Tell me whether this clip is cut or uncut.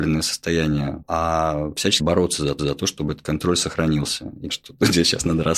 cut